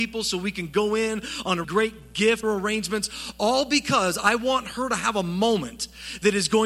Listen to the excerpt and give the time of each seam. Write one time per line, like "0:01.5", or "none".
0:01.6
0:02.4